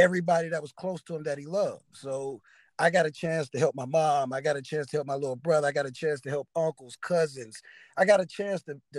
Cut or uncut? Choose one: uncut